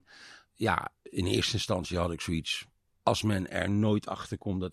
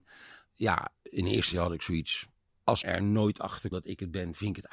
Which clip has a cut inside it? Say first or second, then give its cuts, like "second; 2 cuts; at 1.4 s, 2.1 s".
second; 3 cuts; at 1.5 s, 2.8 s, 3.7 s